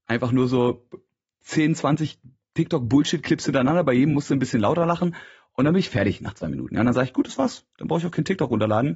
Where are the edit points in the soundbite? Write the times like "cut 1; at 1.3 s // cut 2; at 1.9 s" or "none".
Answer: none